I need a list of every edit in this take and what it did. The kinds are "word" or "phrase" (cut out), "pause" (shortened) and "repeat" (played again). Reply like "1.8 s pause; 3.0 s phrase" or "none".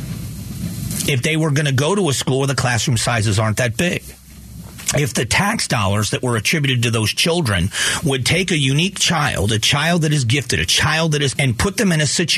11.4 s word